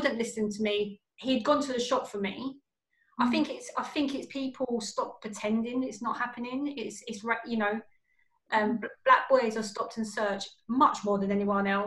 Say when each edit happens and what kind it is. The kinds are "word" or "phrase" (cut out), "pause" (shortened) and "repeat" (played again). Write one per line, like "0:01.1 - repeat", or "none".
none